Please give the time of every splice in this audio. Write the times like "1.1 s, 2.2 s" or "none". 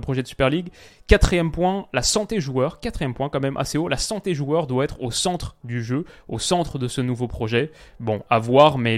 none